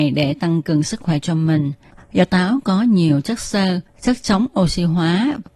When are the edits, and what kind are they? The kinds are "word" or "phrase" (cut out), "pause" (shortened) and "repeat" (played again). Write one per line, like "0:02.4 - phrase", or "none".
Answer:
none